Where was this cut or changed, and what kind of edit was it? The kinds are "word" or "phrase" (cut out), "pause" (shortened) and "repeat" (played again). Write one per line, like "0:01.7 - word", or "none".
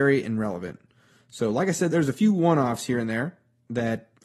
0:01.9 - word

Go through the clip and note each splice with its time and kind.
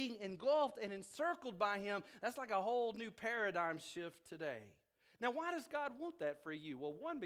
none

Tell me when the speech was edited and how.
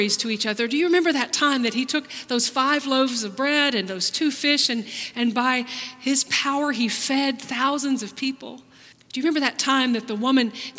0:08.9 - pause

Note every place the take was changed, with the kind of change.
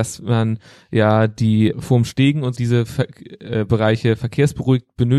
0:01.7 - word
0:02.5 - word

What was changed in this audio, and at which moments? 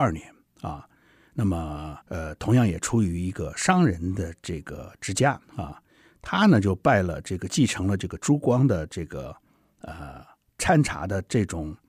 0:02.0 - pause
0:05.4 - pause

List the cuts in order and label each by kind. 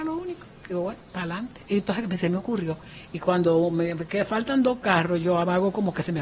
none

